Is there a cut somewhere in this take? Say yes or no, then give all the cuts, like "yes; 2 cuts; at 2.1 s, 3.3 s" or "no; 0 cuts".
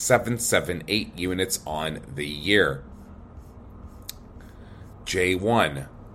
yes; 1 cut; at 4.9 s